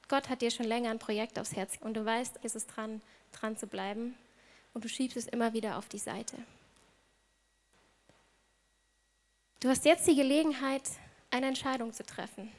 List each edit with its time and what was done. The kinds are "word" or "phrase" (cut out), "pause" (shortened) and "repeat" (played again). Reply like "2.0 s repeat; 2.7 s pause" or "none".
1.8 s word; 2.4 s word